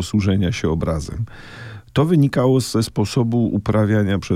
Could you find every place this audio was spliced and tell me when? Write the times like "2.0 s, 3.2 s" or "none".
none